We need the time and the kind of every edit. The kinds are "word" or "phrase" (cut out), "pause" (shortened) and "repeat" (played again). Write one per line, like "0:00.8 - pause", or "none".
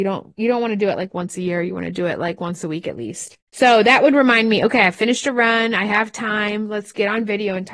0:03.5 - pause